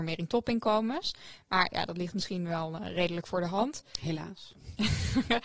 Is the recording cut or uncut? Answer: uncut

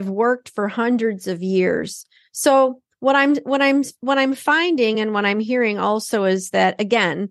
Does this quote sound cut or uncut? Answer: uncut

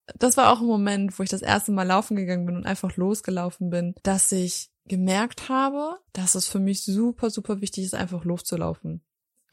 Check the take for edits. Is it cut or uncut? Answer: cut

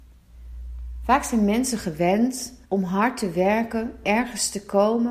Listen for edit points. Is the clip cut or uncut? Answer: cut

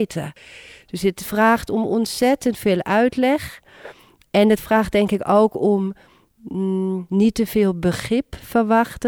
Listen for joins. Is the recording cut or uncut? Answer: uncut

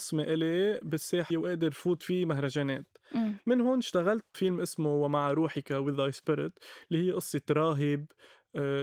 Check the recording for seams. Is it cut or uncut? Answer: cut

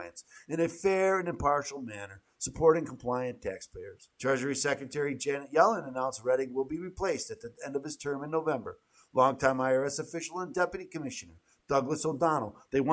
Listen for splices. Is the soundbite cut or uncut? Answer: cut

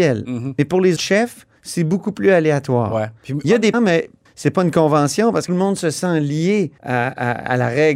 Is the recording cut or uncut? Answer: cut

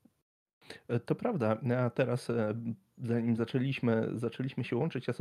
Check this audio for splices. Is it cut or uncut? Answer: uncut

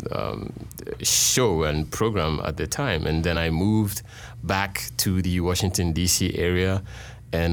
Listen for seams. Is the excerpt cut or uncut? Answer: uncut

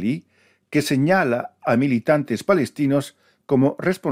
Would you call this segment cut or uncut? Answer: uncut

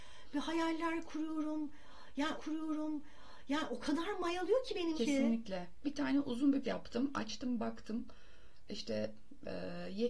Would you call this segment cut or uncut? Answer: cut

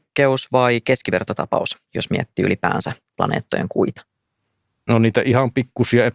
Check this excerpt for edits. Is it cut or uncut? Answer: uncut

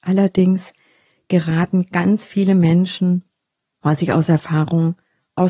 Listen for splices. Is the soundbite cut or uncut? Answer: uncut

